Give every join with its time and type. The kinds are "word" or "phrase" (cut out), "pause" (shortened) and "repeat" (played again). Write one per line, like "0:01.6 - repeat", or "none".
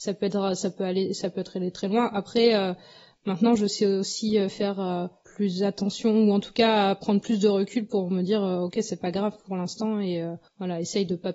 none